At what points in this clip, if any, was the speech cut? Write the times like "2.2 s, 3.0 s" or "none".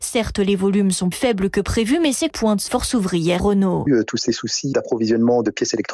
1.1 s, 2.3 s, 2.7 s, 3.4 s, 3.9 s, 4.7 s